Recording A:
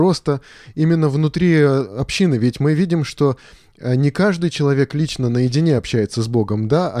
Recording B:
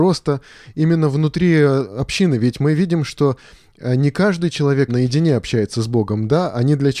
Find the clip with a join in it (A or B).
B